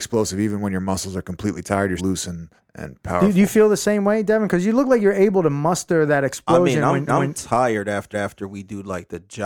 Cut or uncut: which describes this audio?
cut